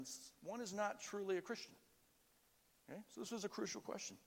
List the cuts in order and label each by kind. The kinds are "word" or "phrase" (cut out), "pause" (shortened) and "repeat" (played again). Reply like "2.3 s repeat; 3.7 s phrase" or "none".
none